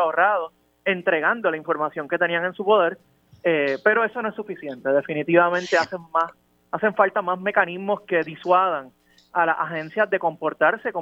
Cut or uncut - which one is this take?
uncut